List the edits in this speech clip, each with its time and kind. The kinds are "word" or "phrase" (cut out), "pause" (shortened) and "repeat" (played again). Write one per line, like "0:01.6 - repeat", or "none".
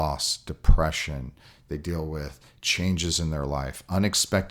none